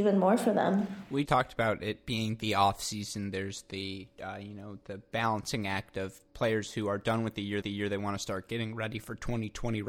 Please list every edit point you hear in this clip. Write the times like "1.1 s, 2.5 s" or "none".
1.3 s, 7.6 s